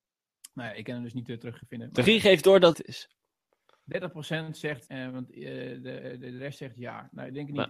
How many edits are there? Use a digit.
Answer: 3